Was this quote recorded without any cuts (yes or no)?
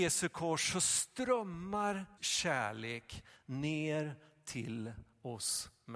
no